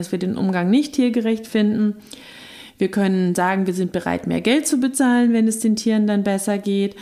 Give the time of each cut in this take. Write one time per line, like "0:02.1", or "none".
none